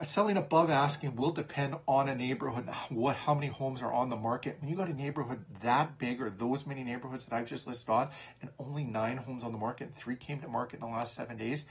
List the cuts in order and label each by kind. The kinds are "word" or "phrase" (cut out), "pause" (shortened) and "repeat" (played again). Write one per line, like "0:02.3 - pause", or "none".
none